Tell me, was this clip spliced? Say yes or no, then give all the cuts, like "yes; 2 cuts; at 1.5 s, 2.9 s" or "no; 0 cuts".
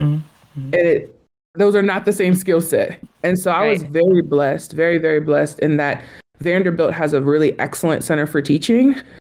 no; 0 cuts